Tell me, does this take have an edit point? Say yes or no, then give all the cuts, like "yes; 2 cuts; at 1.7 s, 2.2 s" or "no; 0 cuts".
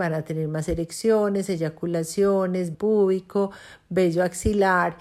yes; 1 cut; at 2.7 s